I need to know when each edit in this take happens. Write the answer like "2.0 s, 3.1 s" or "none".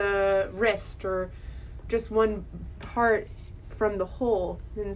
1.9 s, 2.8 s, 3.7 s